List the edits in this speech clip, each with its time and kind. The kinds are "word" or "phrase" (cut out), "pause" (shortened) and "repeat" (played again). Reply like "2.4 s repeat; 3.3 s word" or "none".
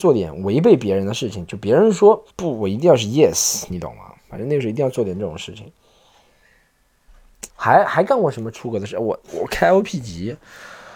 2.3 s pause; 4.2 s pause; 7.5 s pause; 9.2 s pause